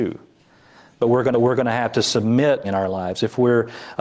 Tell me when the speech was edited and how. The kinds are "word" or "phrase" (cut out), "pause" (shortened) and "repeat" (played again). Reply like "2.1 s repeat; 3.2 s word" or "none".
1.3 s repeat; 2.6 s phrase